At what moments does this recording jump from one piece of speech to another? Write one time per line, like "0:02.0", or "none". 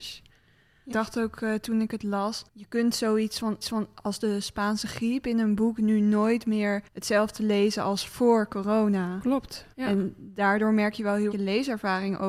0:00.9
0:02.5
0:03.6
0:06.9
0:09.7
0:11.3